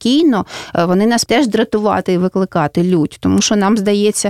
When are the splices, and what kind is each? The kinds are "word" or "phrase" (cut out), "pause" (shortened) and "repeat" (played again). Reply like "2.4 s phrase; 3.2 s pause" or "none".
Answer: 1.3 s word